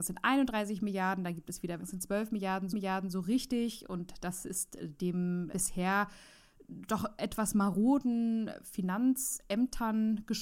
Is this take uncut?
no; 3 cuts; at 1.8 s, 2.7 s, 5.5 s

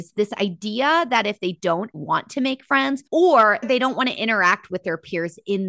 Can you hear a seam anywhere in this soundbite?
yes; 2 cuts; at 1.9 s, 3.0 s

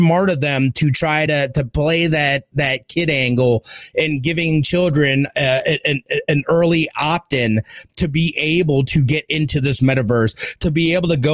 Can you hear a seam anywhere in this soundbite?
no; 0 cuts

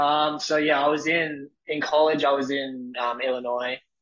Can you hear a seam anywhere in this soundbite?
no; 0 cuts

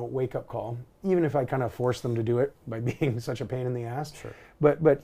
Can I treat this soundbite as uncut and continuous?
yes; 0 cuts

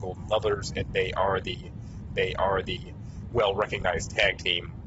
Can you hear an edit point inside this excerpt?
yes; 1 cut; at 2.1 s

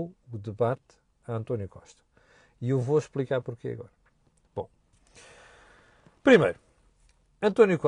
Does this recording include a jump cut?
no; 0 cuts

